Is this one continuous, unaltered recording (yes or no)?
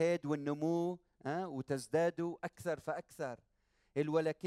yes